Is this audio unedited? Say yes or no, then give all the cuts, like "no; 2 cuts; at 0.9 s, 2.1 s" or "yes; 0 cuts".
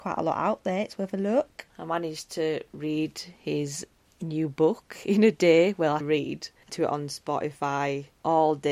no; 2 cuts; at 6.0 s, 6.7 s